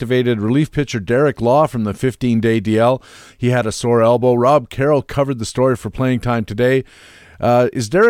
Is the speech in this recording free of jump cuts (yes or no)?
yes